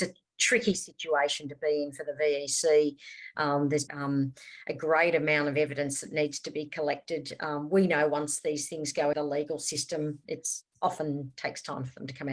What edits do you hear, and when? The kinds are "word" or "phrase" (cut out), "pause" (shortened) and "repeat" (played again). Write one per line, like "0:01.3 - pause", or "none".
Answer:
0:03.9 - word
0:09.1 - word